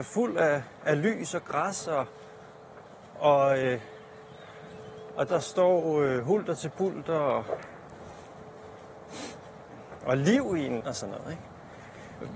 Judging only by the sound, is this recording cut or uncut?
cut